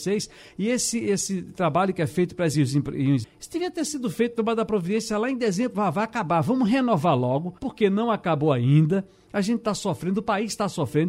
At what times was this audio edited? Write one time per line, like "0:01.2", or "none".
0:02.5
0:03.2
0:07.6